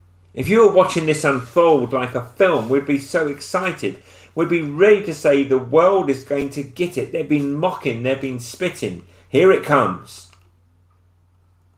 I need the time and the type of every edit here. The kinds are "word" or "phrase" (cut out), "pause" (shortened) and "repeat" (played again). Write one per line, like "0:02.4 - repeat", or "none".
none